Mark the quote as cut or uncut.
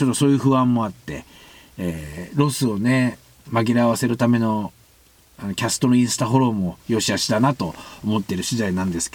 uncut